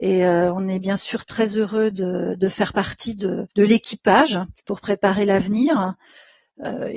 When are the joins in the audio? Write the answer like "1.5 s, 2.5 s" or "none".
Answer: 3.5 s, 4.6 s